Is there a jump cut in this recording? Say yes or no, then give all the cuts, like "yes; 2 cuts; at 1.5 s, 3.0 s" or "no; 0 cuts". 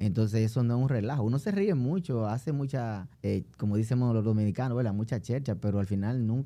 yes; 1 cut; at 3.1 s